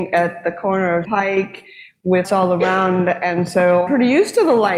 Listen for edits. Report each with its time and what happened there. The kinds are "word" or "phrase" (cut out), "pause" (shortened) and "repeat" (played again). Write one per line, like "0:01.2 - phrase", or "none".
0:01.0 - phrase
0:02.2 - word
0:03.9 - word